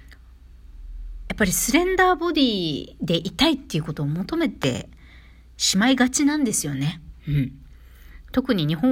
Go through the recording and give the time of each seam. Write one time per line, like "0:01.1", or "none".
none